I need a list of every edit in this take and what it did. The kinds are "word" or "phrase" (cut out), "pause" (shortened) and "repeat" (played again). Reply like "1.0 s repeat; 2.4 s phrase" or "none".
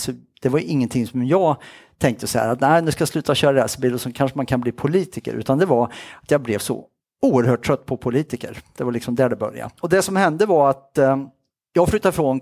none